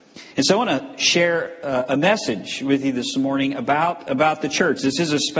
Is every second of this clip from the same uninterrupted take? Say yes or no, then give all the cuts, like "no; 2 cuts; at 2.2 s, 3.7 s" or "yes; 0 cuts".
yes; 0 cuts